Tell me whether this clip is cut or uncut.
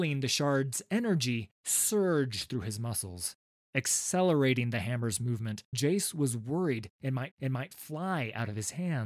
cut